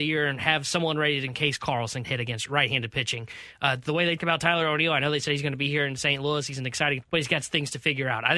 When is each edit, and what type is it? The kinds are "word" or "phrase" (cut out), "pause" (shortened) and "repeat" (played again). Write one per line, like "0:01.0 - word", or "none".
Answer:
0:01.3 - word
0:02.0 - word
0:02.5 - word
0:04.2 - word
0:07.0 - word